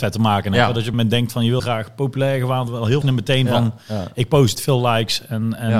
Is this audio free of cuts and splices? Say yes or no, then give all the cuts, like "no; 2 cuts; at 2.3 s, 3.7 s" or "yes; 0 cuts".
no; 5 cuts; at 0.9 s, 1.6 s, 2.7 s, 3.0 s, 4.5 s